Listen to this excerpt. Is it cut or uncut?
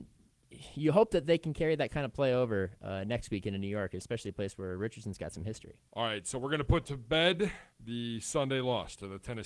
cut